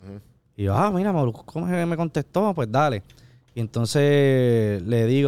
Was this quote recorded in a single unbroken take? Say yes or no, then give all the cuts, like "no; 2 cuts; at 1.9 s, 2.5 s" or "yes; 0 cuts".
yes; 0 cuts